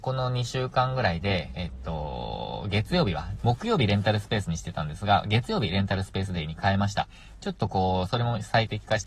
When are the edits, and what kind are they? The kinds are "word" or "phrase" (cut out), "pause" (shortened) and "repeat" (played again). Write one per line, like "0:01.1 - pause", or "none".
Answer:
0:03.4 - word

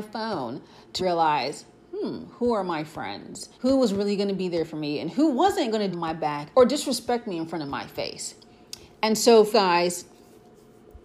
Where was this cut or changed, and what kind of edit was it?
0:01.0 - word
0:03.5 - pause
0:05.9 - phrase
0:06.5 - pause
0:09.5 - word

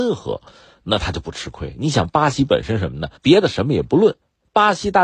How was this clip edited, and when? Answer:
0:03.2 - pause

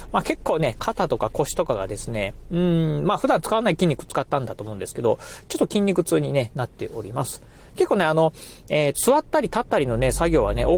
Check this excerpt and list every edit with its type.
0:08.9 - word

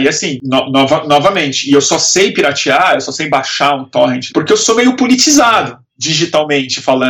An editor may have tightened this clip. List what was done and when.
0:04.3 - phrase

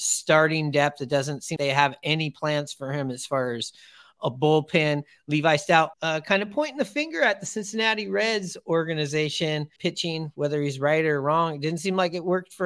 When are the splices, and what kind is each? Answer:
0:01.6 - word
0:05.9 - word
0:09.8 - phrase

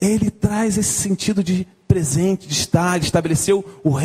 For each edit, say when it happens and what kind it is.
none

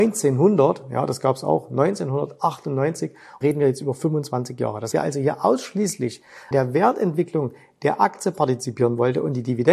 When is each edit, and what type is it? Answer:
0:03.4 - word
0:04.9 - word
0:06.5 - word

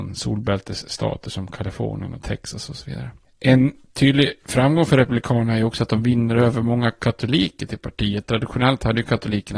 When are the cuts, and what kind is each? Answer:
none

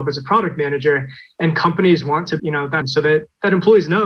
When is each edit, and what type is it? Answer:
0:02.4 - word
0:02.8 - word

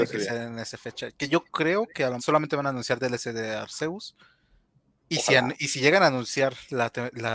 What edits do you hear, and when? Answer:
0:02.2 - word

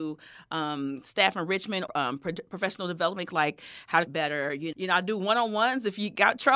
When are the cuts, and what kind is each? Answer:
0:01.9 - word
0:03.3 - word
0:04.1 - word
0:04.7 - word

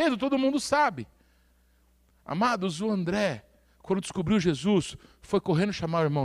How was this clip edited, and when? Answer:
none

